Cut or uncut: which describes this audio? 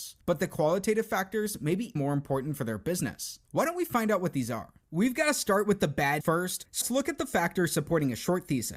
cut